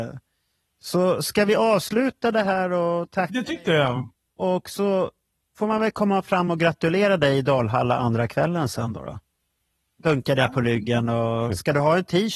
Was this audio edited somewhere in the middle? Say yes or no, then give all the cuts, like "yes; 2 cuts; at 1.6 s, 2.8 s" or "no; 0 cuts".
no; 0 cuts